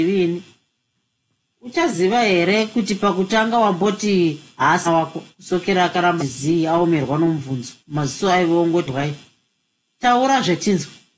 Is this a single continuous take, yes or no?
no